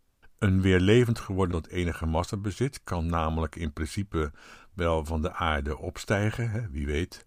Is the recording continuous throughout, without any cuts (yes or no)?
no